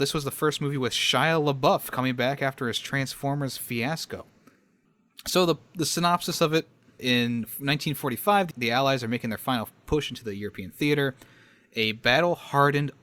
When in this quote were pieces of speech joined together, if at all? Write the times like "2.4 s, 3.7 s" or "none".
none